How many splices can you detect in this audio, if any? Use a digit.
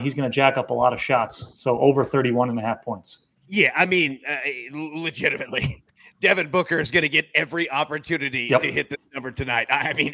2